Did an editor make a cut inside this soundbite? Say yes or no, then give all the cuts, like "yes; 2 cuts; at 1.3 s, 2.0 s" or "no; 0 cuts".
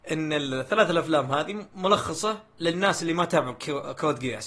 no; 0 cuts